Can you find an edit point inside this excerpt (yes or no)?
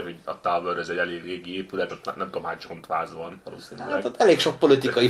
yes